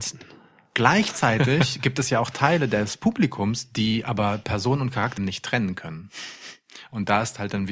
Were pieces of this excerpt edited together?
yes; 1 cut; at 5.2 s

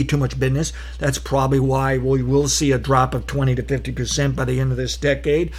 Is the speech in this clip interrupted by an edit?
no; 0 cuts

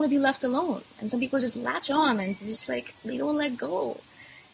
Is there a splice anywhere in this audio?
no; 0 cuts

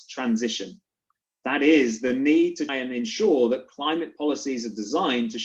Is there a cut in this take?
yes; 1 cut; at 2.7 s

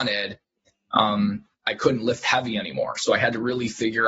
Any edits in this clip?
no; 0 cuts

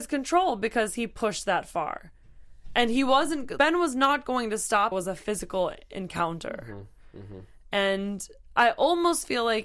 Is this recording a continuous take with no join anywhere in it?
no; 2 cuts; at 3.6 s, 4.9 s

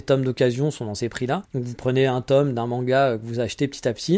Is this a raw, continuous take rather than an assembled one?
no; 1 cut; at 1.4 s

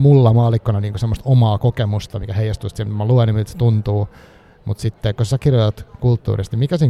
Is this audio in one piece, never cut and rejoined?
yes; 0 cuts

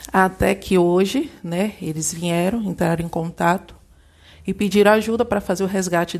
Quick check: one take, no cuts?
yes; 0 cuts

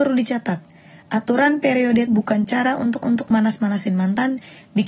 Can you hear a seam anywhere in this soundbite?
yes; 2 cuts; at 2.1 s, 3.0 s

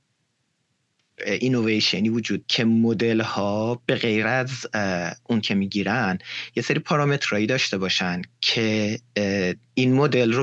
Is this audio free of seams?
no; 2 cuts; at 2.4 s, 5.4 s

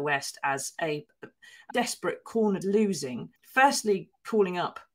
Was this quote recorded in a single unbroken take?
no; 4 cuts; at 1.1 s, 1.7 s, 2.6 s, 3.4 s

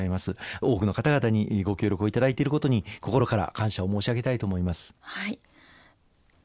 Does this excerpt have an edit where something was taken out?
yes; 1 cut; at 5.0 s

